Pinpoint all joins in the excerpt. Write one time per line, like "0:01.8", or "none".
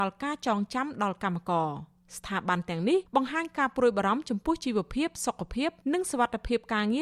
0:03.1